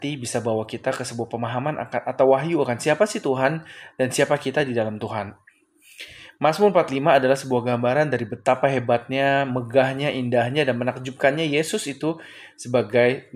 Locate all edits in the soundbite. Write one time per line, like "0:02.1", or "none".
none